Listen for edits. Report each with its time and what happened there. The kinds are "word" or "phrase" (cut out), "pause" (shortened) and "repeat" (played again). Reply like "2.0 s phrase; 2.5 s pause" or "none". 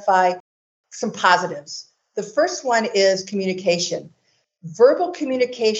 none